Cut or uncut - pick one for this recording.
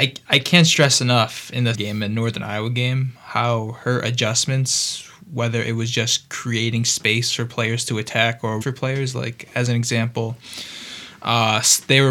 cut